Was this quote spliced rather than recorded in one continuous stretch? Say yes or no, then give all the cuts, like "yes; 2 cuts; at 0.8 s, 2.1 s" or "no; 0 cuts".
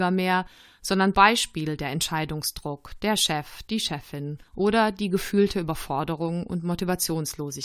yes; 2 cuts; at 1.1 s, 4.5 s